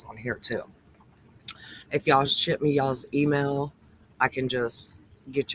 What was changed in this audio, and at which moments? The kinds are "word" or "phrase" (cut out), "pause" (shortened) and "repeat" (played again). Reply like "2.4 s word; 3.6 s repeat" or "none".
none